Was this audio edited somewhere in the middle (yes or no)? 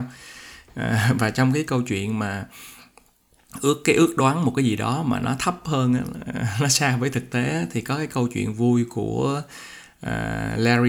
no